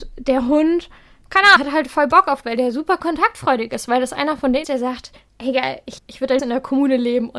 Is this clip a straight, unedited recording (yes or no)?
no